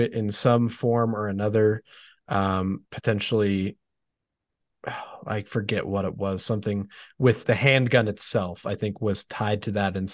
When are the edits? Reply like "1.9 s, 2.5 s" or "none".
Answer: 2.9 s, 7.4 s